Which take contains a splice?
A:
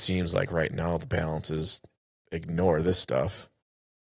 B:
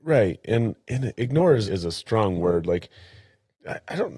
B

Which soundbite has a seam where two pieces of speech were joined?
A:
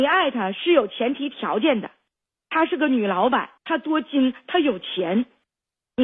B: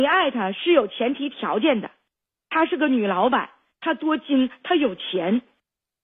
A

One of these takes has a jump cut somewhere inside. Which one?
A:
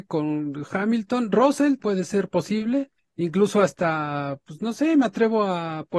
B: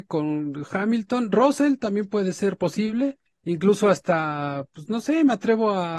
A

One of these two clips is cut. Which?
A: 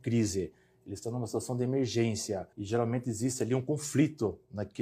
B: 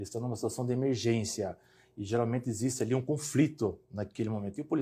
A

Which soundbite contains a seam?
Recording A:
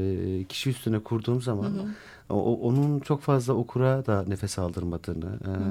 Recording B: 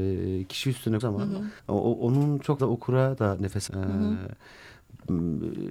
B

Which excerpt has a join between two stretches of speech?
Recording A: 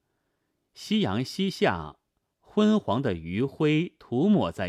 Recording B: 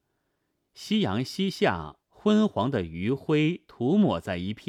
B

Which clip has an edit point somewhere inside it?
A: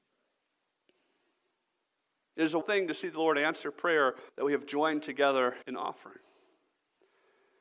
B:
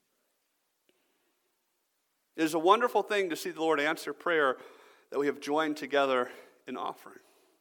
A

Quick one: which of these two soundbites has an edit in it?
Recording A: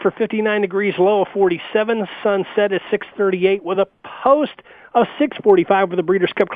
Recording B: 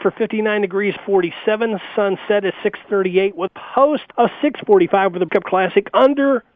B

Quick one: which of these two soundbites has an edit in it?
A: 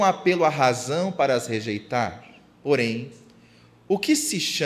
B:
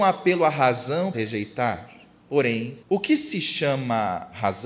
B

